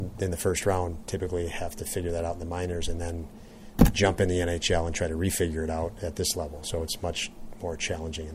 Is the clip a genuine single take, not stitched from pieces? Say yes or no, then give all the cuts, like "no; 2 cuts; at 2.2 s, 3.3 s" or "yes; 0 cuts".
yes; 0 cuts